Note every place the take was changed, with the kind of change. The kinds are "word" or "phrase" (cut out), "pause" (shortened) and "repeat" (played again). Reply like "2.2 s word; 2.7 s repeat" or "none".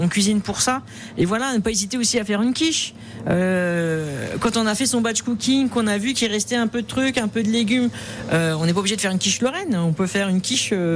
none